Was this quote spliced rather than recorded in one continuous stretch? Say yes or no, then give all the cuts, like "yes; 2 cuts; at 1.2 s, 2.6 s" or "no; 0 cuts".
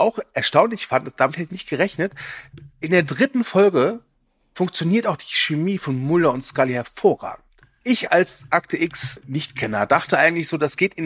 no; 0 cuts